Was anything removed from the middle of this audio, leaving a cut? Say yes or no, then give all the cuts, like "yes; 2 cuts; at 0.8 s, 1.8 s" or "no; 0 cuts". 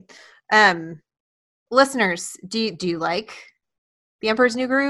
no; 0 cuts